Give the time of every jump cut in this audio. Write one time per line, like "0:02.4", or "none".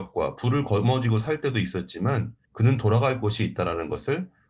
0:02.4